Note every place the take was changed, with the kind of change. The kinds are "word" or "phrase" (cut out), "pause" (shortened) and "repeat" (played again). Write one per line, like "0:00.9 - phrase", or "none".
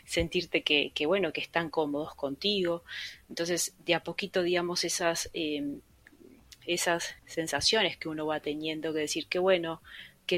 0:07.2 - pause